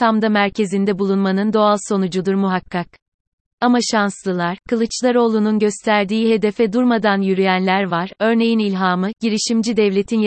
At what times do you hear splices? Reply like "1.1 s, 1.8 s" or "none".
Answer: none